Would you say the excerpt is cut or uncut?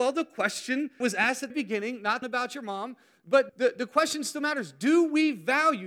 cut